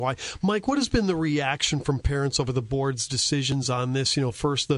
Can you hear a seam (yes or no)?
no